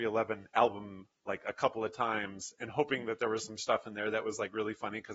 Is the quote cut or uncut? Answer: uncut